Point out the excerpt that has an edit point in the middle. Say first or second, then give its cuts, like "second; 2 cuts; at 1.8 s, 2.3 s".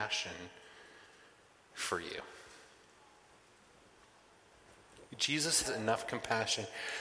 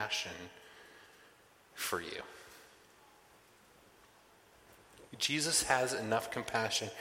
first; 1 cut; at 5.6 s